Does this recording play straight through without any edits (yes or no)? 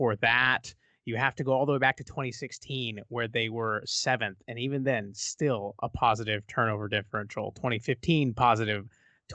yes